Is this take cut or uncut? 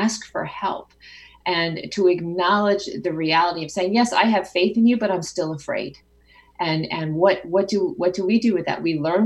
uncut